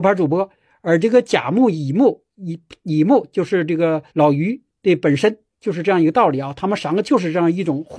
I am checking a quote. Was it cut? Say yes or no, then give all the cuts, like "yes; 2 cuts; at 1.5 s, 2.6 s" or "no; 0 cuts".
yes; 1 cut; at 4.1 s